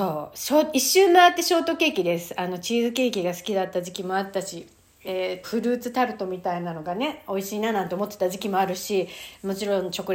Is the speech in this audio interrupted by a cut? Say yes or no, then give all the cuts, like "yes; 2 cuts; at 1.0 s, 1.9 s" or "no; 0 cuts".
yes; 1 cut; at 5.4 s